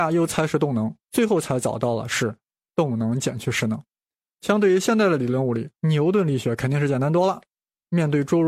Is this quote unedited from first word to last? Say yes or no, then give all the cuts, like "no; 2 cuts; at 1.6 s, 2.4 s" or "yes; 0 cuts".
no; 2 cuts; at 1.0 s, 5.8 s